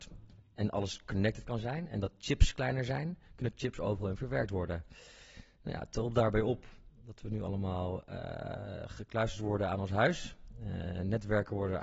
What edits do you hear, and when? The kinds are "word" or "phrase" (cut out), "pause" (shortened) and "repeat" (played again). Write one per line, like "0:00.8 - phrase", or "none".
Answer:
none